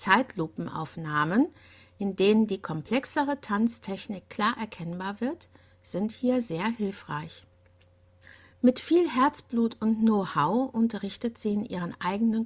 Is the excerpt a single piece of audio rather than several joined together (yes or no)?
yes